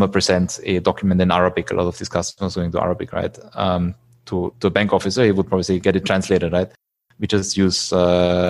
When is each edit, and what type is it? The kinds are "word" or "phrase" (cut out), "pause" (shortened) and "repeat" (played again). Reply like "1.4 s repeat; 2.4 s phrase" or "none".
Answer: 5.8 s word